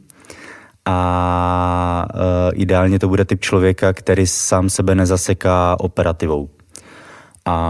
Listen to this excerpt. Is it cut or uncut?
uncut